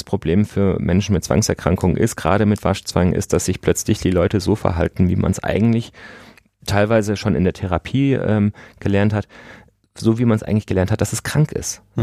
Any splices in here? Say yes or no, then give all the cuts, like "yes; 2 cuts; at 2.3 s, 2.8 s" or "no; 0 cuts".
no; 0 cuts